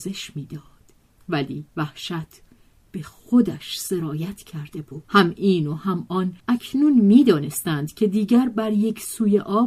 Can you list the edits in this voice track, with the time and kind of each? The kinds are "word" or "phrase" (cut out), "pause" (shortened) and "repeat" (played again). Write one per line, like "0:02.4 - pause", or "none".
0:01.7 - pause
0:05.0 - pause
0:06.4 - pause

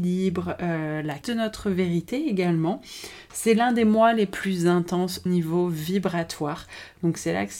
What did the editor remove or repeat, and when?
0:01.2 - word
0:05.3 - word

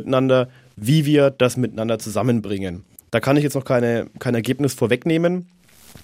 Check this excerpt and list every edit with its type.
none

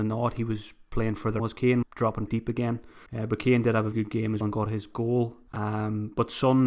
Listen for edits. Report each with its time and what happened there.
0:01.4 - phrase
0:01.8 - word
0:02.3 - word
0:03.1 - pause
0:03.9 - word
0:04.4 - word
0:05.5 - pause

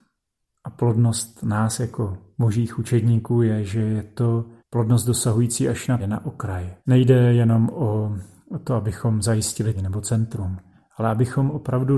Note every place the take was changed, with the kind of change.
0:04.6 - pause
0:06.0 - word
0:06.8 - pause
0:09.7 - phrase

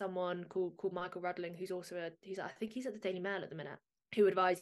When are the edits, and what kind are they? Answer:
none

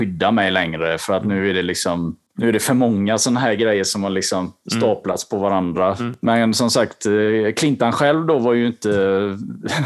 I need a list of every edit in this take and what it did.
none

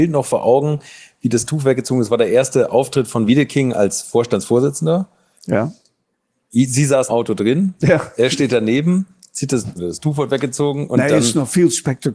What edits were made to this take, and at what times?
0:03.3 - word
0:07.1 - word
0:09.8 - word

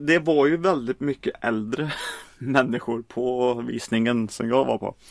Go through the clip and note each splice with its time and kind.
none

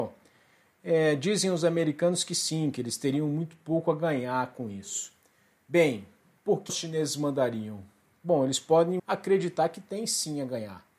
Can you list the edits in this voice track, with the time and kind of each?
0:06.7 - word
0:09.0 - word

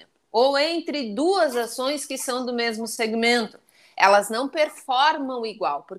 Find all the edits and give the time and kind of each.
none

